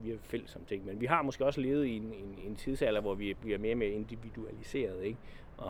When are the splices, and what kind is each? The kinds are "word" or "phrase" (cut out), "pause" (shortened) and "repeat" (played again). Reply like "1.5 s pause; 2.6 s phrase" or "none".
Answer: 2.4 s word